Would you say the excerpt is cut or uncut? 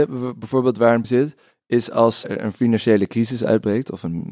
cut